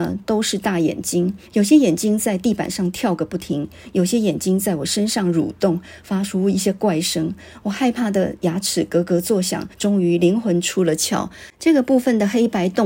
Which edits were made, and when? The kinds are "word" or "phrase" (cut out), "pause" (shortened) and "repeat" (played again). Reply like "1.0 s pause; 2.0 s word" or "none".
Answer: 1.5 s pause; 9.7 s pause